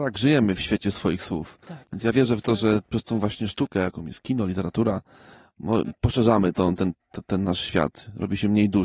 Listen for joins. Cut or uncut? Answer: cut